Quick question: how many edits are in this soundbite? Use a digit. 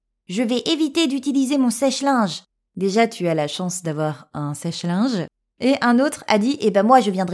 0